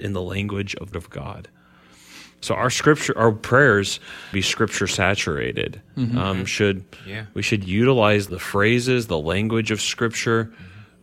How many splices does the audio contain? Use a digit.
3